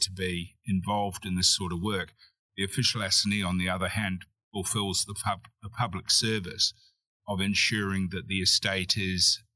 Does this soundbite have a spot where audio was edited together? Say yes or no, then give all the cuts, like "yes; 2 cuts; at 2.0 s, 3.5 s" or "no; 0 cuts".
no; 0 cuts